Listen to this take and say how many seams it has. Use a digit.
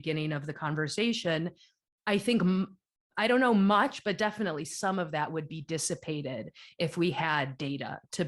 0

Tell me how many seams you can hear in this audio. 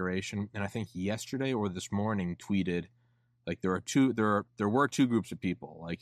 0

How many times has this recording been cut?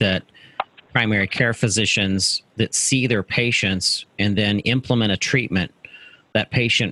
0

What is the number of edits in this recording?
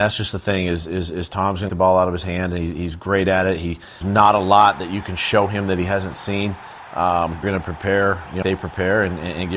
4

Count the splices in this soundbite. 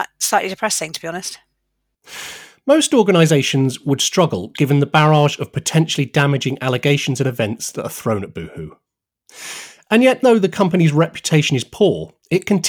1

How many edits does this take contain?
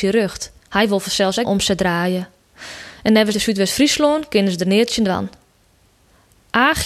2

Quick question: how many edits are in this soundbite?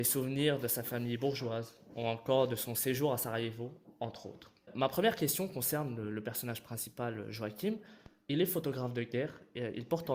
0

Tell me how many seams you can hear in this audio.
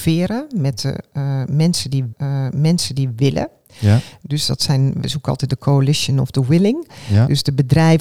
1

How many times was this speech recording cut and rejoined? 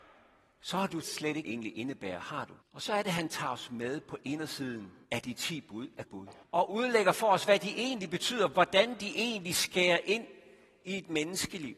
6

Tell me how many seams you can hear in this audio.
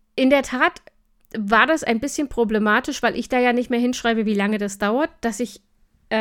0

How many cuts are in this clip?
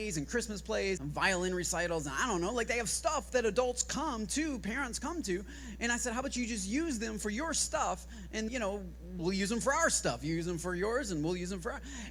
3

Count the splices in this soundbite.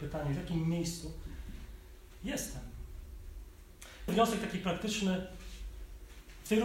1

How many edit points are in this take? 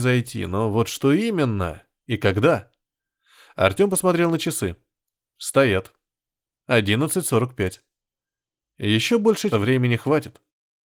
1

